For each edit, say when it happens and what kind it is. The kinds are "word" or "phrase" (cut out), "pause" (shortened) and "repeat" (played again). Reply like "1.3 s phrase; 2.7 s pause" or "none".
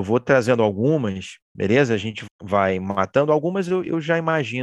2.3 s word